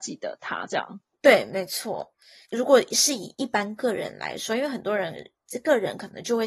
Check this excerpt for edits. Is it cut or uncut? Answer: uncut